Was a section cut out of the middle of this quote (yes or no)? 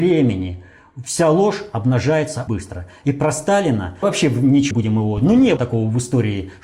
yes